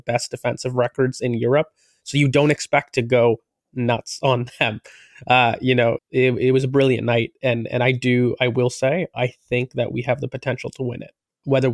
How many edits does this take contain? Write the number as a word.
one